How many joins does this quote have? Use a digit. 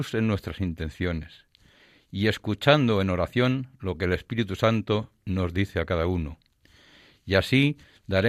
0